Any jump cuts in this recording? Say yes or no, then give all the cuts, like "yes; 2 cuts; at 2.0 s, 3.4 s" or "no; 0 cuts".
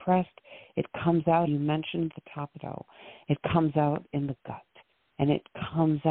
yes; 3 cuts; at 1.5 s, 2.1 s, 2.6 s